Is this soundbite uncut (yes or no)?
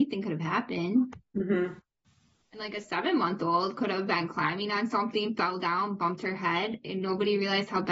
yes